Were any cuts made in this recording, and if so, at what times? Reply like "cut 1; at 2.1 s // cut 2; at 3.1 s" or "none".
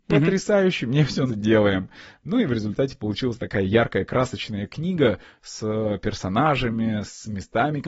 cut 1; at 1.3 s